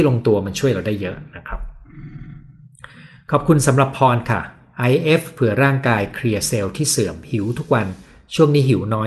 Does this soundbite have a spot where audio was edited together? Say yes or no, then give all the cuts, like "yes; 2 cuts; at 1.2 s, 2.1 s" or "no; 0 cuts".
no; 0 cuts